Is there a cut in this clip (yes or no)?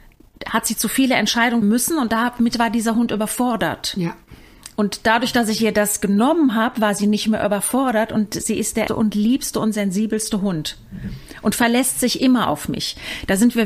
yes